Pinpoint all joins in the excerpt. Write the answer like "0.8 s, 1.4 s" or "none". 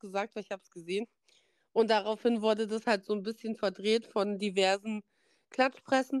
none